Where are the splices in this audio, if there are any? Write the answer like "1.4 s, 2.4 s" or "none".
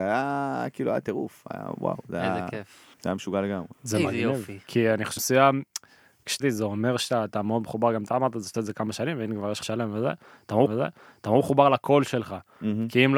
2.9 s, 3.7 s, 5.2 s, 6.4 s, 8.5 s, 9.6 s, 10.7 s